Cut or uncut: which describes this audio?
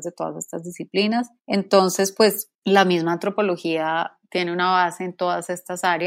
cut